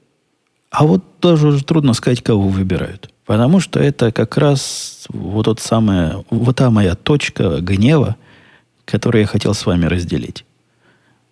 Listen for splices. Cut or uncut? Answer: cut